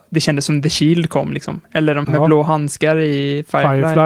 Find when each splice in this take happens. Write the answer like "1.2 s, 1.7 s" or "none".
2.0 s